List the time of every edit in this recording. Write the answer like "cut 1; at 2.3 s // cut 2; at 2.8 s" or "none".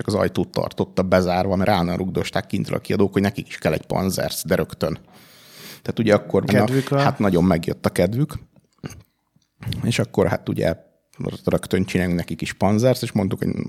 cut 1; at 6.5 s